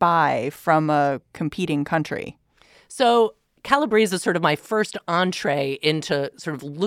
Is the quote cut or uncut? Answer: uncut